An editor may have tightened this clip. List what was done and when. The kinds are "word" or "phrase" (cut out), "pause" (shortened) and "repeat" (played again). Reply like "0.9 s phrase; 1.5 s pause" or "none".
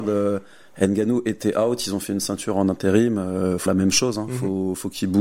3.7 s word